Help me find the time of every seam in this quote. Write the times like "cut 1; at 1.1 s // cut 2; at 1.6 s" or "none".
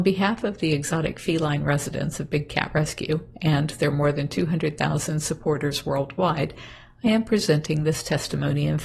none